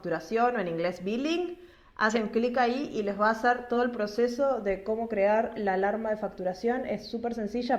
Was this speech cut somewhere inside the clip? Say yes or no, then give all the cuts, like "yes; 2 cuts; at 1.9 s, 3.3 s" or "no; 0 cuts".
no; 0 cuts